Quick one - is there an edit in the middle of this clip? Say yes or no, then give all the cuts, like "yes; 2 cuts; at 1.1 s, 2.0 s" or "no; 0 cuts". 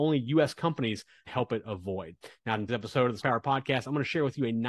yes; 3 cuts; at 1.3 s, 2.7 s, 3.2 s